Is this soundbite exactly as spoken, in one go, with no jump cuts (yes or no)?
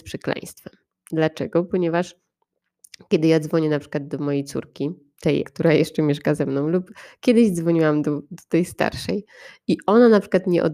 no